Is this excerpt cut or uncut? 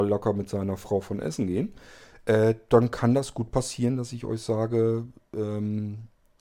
uncut